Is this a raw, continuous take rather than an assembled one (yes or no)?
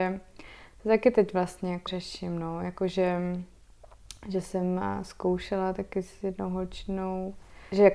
no